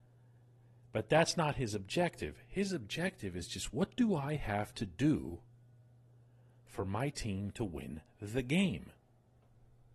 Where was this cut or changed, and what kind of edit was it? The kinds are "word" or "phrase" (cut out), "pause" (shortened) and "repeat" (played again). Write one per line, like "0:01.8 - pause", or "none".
none